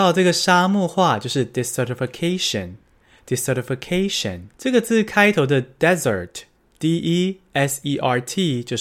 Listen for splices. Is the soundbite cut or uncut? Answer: cut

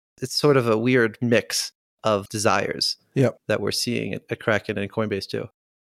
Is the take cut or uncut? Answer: cut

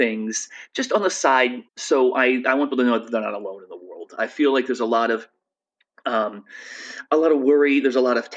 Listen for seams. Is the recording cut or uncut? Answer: cut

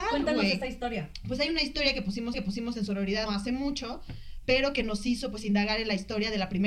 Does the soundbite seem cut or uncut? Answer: cut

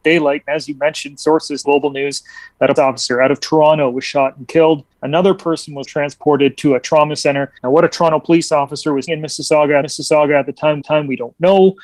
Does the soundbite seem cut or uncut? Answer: cut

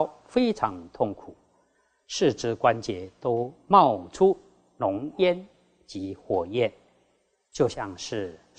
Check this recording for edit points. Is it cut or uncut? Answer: uncut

